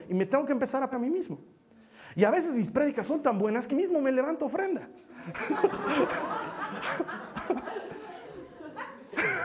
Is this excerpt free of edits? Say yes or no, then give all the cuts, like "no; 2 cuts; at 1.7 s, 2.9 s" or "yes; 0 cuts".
no; 2 cuts; at 0.9 s, 3.7 s